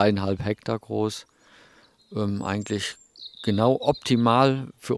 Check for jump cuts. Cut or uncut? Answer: uncut